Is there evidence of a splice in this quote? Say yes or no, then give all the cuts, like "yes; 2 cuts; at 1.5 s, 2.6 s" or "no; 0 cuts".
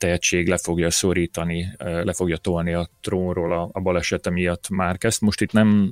no; 0 cuts